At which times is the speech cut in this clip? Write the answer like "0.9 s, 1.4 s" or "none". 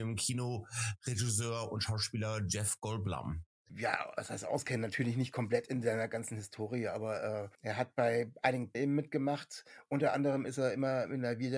7.5 s, 8.7 s